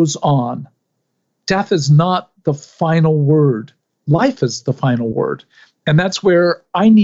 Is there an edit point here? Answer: no; 0 cuts

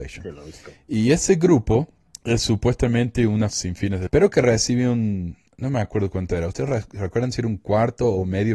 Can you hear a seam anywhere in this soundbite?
yes; 3 cuts; at 2.1 s, 3.5 s, 4.1 s

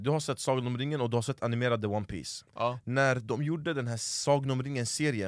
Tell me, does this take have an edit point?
no; 0 cuts

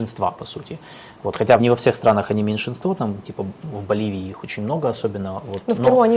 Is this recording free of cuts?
no; 1 cut; at 1.6 s

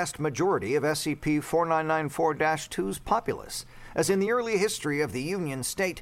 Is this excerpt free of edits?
yes; 0 cuts

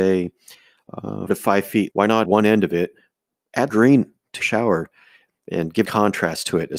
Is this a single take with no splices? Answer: no; 6 cuts; at 1.3 s, 1.9 s, 2.2 s, 3.7 s, 4.4 s, 5.8 s

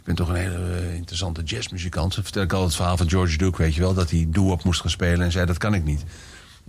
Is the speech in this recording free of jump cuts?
yes; 0 cuts

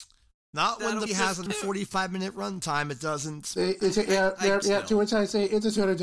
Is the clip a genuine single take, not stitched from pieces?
no; 3 cuts; at 1.1 s, 1.5 s, 4.6 s

